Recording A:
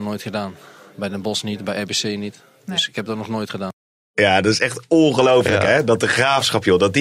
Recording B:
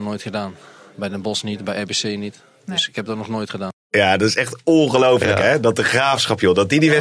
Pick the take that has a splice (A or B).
B